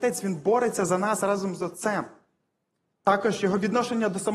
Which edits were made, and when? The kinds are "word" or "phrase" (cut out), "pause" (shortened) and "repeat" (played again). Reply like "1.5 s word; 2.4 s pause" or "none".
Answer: none